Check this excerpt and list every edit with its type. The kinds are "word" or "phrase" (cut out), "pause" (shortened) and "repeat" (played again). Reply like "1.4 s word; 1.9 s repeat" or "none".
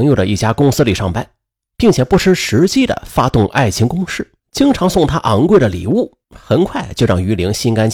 4.4 s pause; 6.2 s pause